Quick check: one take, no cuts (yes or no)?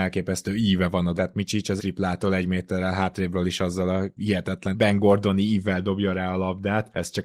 no